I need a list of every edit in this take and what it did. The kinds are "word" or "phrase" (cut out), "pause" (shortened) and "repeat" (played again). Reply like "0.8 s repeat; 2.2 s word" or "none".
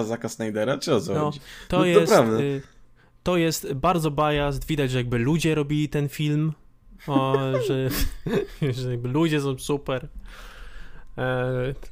none